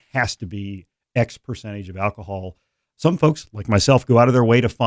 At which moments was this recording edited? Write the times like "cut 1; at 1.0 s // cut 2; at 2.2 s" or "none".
none